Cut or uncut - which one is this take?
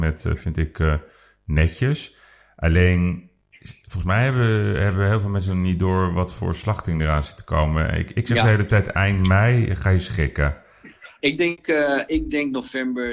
uncut